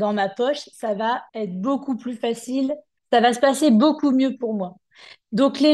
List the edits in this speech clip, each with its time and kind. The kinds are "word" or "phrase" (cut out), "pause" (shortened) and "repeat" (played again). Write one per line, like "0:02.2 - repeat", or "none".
0:01.3 - pause
0:03.0 - pause